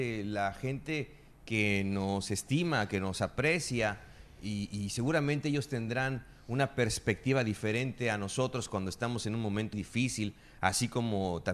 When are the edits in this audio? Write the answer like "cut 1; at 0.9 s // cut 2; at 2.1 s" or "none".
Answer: cut 1; at 9.7 s